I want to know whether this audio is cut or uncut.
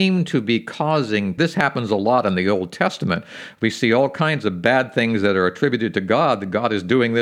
cut